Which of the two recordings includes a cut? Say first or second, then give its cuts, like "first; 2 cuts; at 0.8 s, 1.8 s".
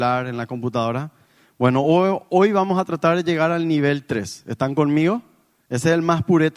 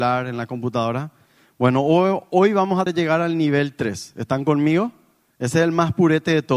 second; 1 cut; at 2.9 s